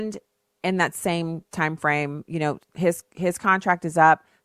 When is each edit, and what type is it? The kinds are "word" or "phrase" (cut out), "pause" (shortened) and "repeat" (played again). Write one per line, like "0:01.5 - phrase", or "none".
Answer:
none